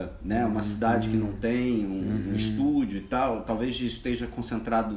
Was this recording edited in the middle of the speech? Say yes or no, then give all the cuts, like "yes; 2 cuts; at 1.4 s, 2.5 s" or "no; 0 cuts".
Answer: no; 0 cuts